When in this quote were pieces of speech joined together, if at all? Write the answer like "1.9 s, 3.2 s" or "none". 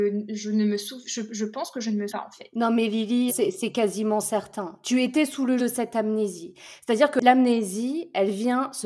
2.1 s, 3.3 s, 5.6 s